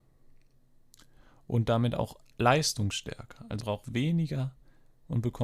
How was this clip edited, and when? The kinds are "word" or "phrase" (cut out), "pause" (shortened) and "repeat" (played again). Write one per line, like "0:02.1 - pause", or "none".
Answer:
0:03.6 - word